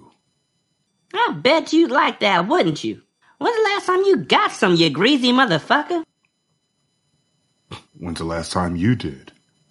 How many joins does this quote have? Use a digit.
2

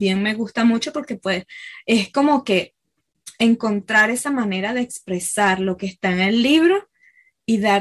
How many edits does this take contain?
0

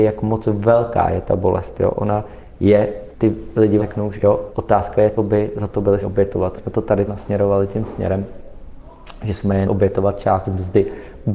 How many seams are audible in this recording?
9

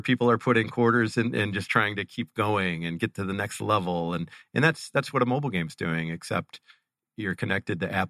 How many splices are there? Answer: 0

